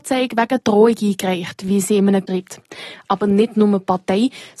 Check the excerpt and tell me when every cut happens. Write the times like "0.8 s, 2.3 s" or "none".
2.3 s